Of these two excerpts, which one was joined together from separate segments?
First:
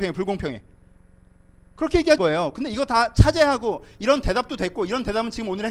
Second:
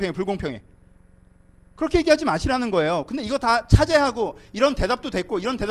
first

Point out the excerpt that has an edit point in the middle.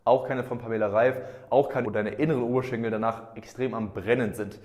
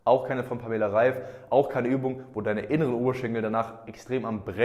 first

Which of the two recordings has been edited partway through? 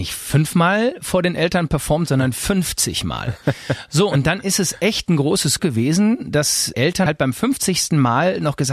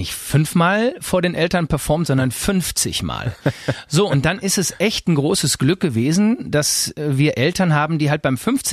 first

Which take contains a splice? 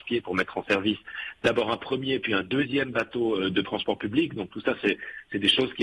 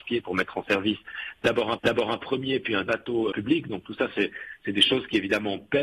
second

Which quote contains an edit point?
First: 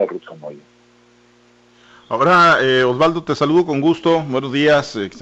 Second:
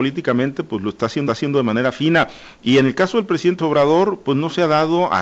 second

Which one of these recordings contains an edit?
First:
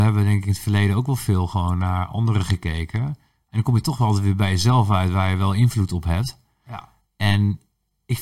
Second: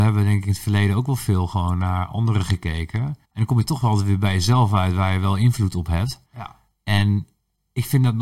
second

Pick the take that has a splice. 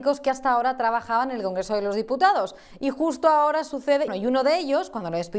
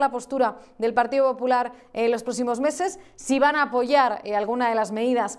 first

